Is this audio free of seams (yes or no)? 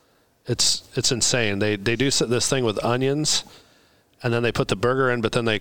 yes